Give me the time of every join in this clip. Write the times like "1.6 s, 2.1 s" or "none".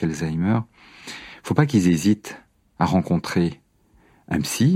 none